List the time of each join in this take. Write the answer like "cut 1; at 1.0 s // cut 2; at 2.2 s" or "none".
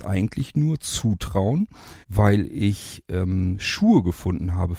cut 1; at 2.0 s